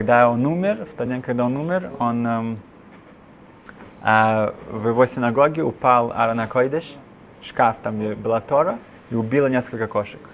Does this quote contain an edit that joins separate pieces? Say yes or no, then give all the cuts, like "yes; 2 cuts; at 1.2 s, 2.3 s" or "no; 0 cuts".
no; 0 cuts